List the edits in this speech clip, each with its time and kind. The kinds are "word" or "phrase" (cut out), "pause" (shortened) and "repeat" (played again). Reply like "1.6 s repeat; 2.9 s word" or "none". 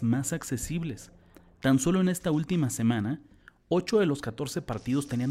none